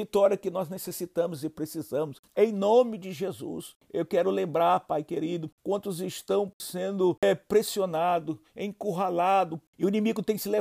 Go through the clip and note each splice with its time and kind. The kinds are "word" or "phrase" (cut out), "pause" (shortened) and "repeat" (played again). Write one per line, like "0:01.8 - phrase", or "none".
none